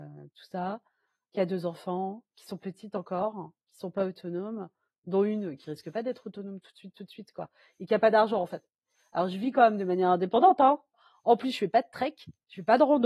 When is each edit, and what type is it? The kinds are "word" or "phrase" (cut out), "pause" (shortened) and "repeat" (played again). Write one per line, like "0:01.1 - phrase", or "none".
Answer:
none